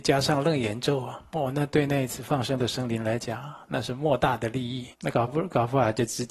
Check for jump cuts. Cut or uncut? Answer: cut